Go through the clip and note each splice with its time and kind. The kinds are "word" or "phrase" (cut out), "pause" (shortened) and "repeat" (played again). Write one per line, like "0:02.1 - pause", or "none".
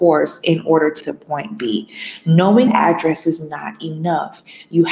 0:01.0 - word
0:02.7 - word